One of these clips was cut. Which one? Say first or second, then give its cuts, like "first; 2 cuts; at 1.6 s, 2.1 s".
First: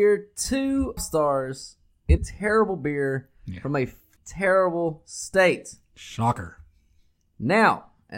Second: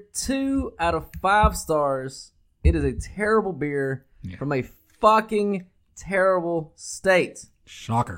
first; 3 cuts; at 1.0 s, 2.2 s, 4.2 s